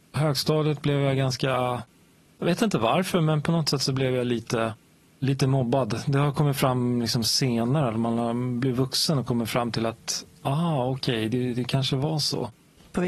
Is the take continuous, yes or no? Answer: yes